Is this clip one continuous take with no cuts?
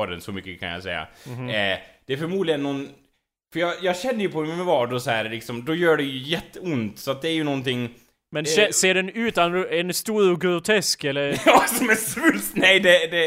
yes; 0 cuts

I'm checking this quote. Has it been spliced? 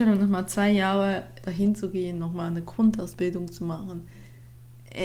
no; 0 cuts

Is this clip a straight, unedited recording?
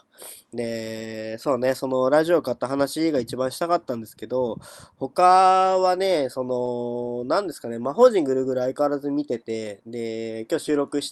yes; 0 cuts

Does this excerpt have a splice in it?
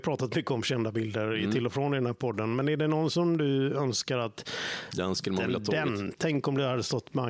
no; 0 cuts

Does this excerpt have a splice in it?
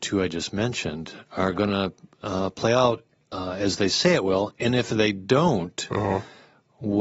no; 0 cuts

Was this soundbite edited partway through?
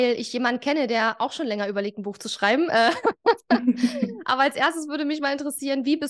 no; 0 cuts

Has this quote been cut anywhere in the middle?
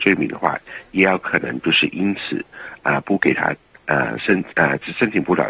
no; 0 cuts

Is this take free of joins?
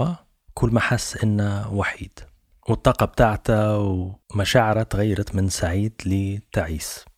no; 1 cut; at 4.2 s

